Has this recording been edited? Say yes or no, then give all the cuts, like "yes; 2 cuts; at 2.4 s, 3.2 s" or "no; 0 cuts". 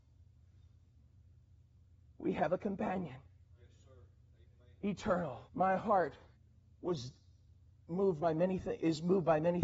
yes; 2 cuts; at 5.5 s, 6.3 s